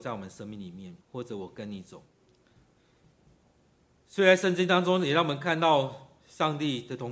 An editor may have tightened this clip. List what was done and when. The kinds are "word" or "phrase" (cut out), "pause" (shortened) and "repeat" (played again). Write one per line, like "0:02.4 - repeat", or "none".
0:01.0 - pause
0:02.1 - pause